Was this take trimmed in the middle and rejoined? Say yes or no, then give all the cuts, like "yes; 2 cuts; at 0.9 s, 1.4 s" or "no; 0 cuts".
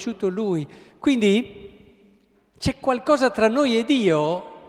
no; 0 cuts